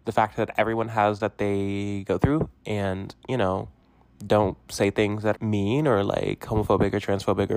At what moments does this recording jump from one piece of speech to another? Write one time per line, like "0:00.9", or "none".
0:01.2
0:03.8
0:05.4